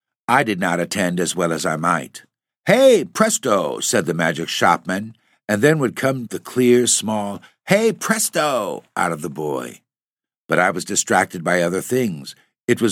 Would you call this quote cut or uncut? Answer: uncut